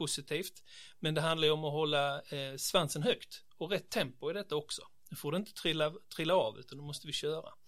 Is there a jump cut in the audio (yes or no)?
no